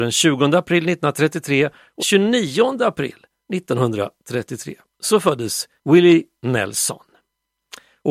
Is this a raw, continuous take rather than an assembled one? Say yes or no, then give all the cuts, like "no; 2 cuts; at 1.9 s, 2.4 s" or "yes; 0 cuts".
no; 2 cuts; at 2.0 s, 5.8 s